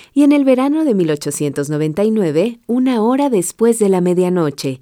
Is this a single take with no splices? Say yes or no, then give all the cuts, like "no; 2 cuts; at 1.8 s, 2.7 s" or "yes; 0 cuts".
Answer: yes; 0 cuts